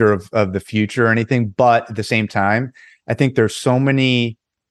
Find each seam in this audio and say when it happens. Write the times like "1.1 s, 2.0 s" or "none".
none